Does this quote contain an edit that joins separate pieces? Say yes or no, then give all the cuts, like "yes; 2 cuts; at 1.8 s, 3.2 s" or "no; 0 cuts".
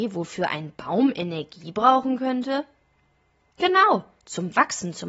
no; 0 cuts